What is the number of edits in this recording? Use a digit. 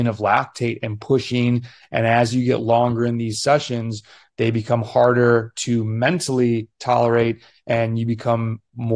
0